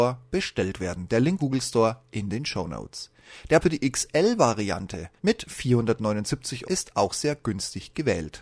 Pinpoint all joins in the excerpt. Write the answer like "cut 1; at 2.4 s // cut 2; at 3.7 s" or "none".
cut 1; at 1.4 s // cut 2; at 3.6 s // cut 3; at 5.2 s // cut 4; at 6.6 s

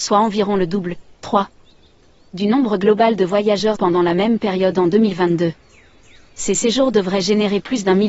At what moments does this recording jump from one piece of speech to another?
cut 1; at 3.8 s

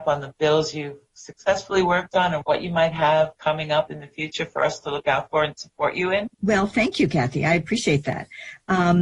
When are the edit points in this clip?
cut 1; at 6.3 s

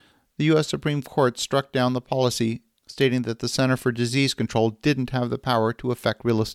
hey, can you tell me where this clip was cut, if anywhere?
none

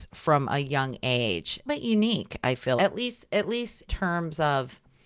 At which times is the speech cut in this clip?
cut 1; at 1.7 s // cut 2; at 2.8 s // cut 3; at 3.9 s

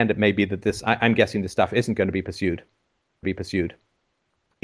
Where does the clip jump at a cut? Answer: cut 1; at 3.2 s

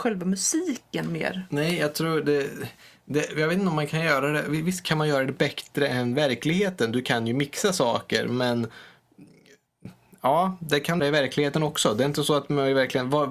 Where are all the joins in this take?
cut 1; at 11.0 s

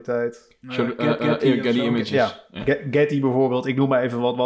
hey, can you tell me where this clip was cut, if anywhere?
cut 1; at 1.2 s

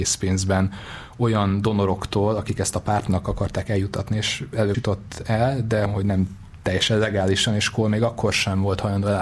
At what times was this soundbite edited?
cut 1; at 4.7 s // cut 2; at 5.9 s

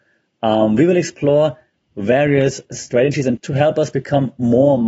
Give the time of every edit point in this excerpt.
cut 1; at 3.4 s

